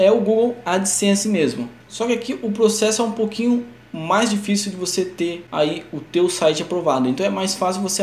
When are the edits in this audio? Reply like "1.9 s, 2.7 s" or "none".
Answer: 1.8 s

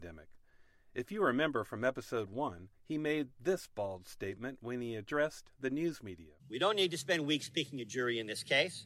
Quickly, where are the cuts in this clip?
2.7 s, 6.4 s

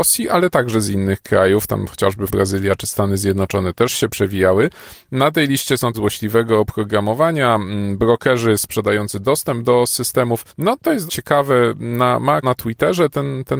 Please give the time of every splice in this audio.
2.3 s, 5.9 s, 10.5 s, 11.1 s, 12.4 s

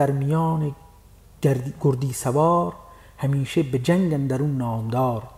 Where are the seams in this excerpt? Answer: none

